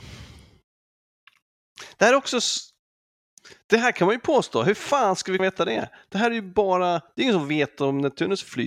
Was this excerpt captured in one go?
no; 1 cut; at 5.4 s

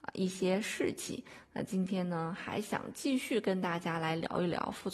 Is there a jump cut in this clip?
no; 0 cuts

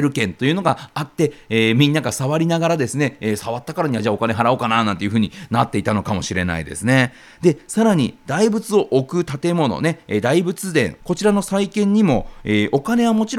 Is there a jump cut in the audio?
yes; 1 cut; at 11.0 s

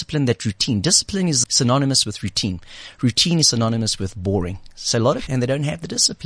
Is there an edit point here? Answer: yes; 2 cuts; at 1.4 s, 5.3 s

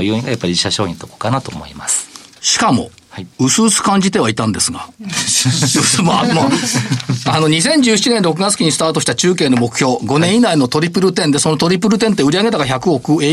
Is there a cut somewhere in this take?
yes; 1 cut; at 3.3 s

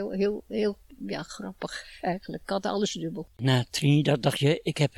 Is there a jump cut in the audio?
yes; 1 cut; at 3.3 s

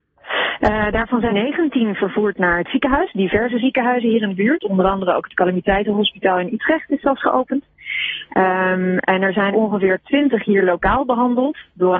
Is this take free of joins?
no; 2 cuts; at 1.3 s, 9.5 s

